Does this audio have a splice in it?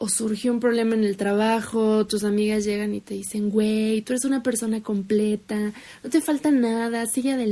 no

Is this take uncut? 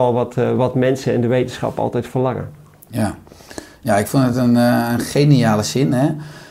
yes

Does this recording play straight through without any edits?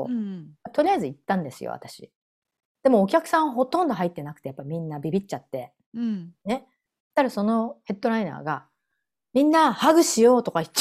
yes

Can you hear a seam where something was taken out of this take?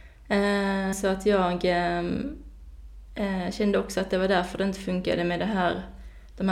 yes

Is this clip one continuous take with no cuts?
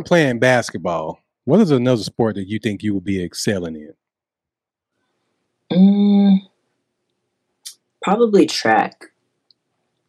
yes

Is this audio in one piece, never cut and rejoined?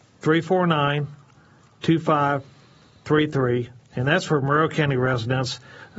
yes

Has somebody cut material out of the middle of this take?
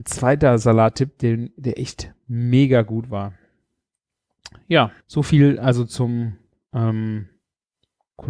yes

